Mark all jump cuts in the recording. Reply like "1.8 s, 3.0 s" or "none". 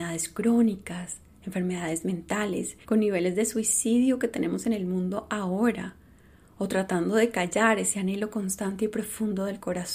2.8 s